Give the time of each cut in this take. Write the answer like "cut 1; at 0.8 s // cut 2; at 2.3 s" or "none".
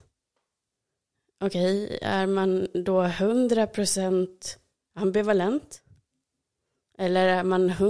none